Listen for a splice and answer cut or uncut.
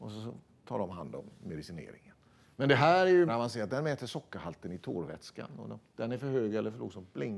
cut